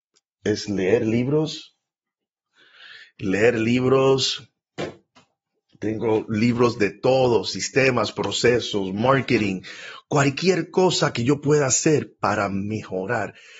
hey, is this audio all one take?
yes; 0 cuts

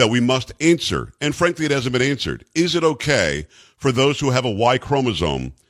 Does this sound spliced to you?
no; 0 cuts

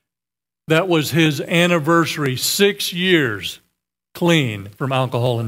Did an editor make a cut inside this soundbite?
no; 0 cuts

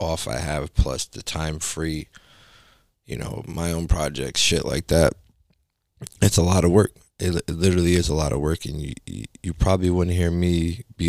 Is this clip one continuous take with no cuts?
yes; 0 cuts

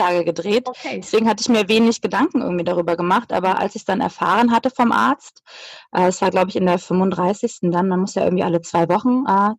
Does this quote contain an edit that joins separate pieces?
no; 0 cuts

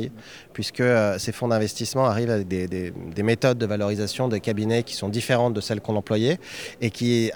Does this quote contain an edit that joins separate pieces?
no; 0 cuts

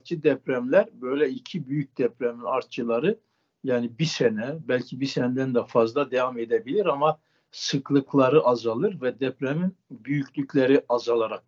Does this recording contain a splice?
no; 0 cuts

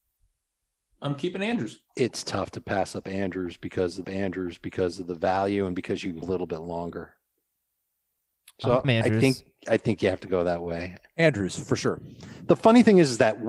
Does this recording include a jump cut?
yes; 4 cuts; at 1.9 s, 4.0 s, 6.2 s, 8.8 s

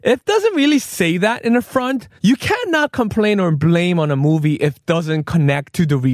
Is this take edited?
yes; 1 cut; at 2.2 s

